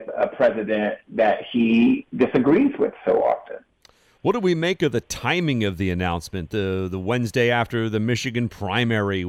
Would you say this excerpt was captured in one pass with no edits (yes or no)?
yes